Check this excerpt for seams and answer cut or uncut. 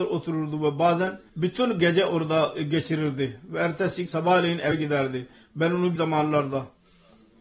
cut